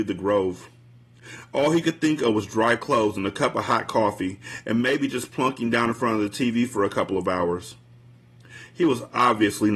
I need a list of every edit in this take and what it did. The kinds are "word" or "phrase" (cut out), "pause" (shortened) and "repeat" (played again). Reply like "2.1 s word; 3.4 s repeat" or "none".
none